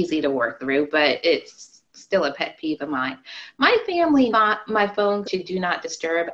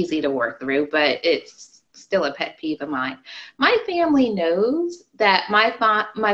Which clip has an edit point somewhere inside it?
first; 2 cuts; at 4.3 s, 5.2 s

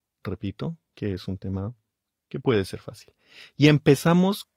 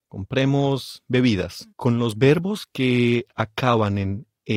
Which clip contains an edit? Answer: second; 1 cut; at 1.7 s

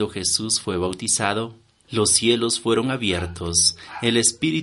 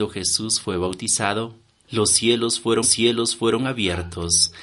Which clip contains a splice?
second; 1 cut; at 2.8 s

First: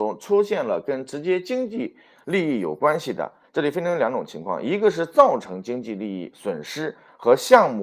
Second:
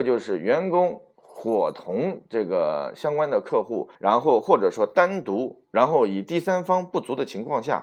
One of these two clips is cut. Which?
second; 1 cut; at 3.9 s

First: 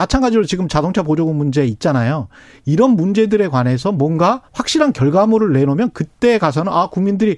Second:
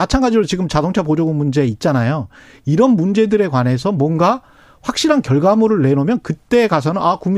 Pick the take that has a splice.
first; 1 cut; at 4.5 s

